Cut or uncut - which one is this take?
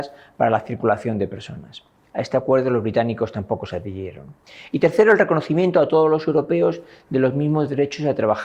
uncut